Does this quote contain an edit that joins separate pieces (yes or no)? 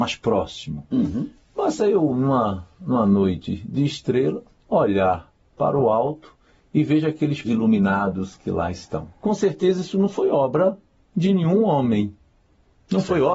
yes